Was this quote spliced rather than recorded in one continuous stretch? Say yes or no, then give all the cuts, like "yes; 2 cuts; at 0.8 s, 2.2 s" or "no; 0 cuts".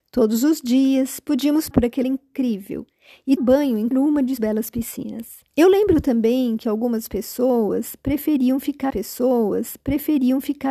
yes; 7 cuts; at 1.7 s, 2.0 s, 3.4 s, 3.9 s, 4.4 s, 5.5 s, 8.9 s